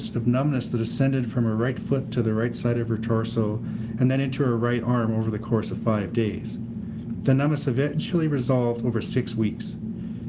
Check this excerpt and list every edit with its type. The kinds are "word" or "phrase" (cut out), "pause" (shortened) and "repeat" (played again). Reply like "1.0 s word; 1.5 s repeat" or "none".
none